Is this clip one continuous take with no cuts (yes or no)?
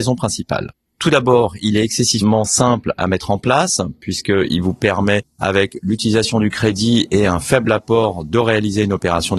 yes